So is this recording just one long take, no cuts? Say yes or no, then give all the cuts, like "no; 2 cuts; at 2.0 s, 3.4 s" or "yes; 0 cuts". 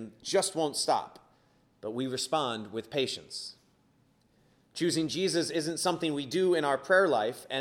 yes; 0 cuts